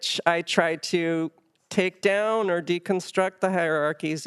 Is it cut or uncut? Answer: uncut